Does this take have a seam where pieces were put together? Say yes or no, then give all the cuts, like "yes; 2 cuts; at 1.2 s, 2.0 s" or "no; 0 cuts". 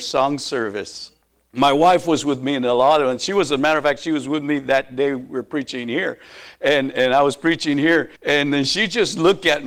yes; 2 cuts; at 1.2 s, 8.2 s